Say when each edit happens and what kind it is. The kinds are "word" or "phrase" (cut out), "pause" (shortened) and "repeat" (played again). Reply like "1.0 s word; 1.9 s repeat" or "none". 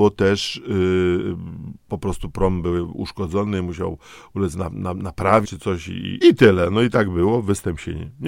5.4 s word; 6.2 s word